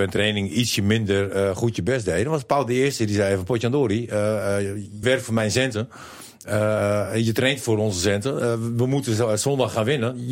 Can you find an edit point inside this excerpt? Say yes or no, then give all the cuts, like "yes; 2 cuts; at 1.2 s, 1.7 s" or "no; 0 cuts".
yes; 1 cut; at 5.0 s